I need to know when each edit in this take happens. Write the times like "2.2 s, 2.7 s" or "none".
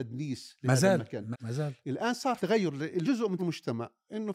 1.3 s, 2.4 s, 3.0 s, 3.4 s